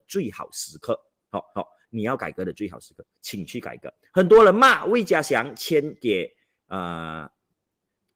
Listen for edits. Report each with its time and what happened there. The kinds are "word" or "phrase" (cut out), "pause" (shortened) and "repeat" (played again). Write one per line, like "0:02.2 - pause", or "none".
0:01.5 - repeat